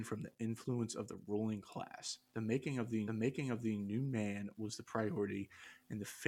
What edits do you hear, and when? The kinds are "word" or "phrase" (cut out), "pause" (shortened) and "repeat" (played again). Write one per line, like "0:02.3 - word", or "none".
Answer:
0:03.1 - repeat